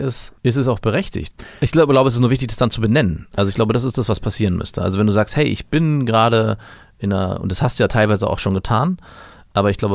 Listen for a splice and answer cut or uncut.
uncut